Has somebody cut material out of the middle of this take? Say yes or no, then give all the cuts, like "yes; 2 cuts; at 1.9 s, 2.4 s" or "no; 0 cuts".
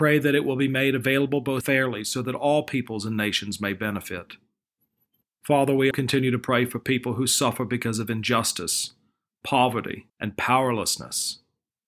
yes; 3 cuts; at 1.6 s, 5.9 s, 10.1 s